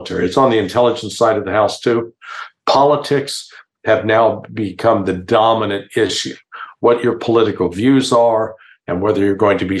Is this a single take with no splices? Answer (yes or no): yes